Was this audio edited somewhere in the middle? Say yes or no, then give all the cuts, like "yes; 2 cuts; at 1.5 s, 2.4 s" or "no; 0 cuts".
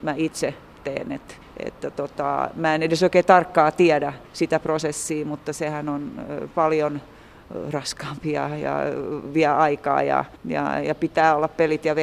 yes; 3 cuts; at 1.4 s, 4.3 s, 10.4 s